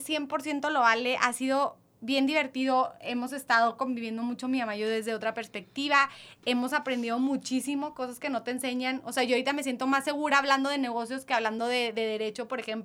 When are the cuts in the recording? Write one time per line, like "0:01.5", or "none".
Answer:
none